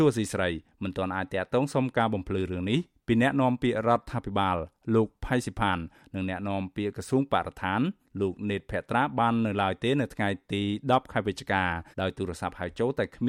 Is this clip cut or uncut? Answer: cut